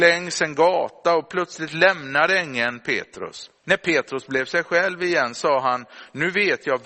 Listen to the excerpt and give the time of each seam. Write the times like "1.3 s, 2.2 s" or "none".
3.6 s